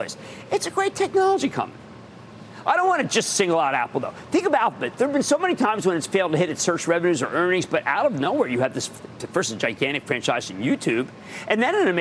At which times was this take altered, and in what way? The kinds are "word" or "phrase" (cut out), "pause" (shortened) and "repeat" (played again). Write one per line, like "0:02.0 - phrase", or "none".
none